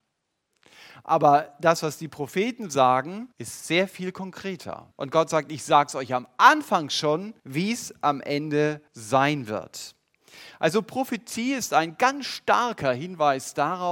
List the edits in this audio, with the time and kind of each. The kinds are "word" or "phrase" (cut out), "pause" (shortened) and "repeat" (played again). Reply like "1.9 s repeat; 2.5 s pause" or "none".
3.3 s pause; 4.9 s pause; 7.4 s pause; 8.9 s pause